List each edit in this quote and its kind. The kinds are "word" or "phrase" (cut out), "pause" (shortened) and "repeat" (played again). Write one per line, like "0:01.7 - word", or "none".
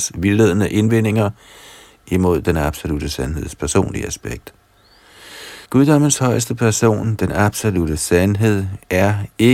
0:05.6 - pause